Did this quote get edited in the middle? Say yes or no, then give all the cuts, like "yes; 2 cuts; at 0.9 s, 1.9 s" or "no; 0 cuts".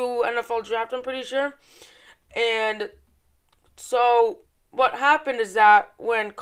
yes; 1 cut; at 4.4 s